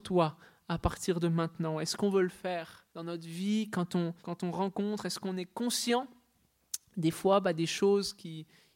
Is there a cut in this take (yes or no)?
yes